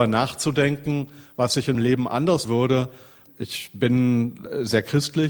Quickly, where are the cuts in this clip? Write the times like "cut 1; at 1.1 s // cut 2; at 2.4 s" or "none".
cut 1; at 1.7 s // cut 2; at 2.4 s // cut 3; at 3.3 s